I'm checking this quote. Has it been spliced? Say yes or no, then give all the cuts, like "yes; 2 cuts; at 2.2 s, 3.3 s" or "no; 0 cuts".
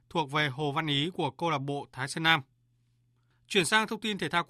no; 0 cuts